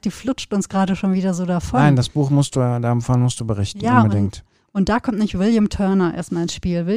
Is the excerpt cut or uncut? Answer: uncut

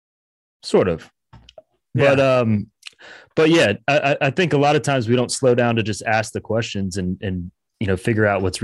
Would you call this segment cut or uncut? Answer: uncut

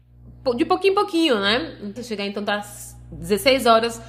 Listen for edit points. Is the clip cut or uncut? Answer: cut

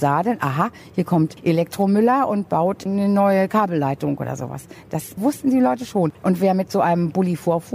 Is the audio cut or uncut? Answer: uncut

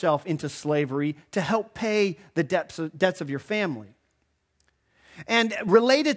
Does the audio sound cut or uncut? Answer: uncut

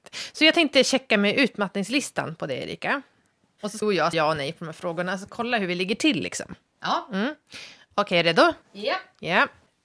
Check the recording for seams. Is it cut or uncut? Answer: cut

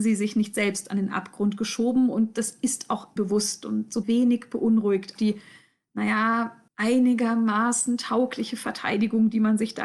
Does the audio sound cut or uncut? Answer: cut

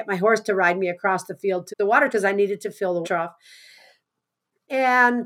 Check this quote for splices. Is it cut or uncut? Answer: cut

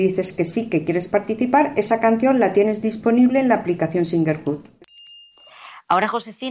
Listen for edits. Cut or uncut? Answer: uncut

